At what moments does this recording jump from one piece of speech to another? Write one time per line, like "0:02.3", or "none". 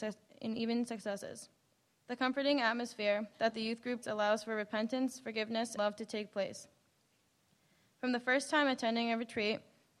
0:04.0
0:05.8